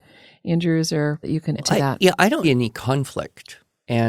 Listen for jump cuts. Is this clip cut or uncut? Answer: cut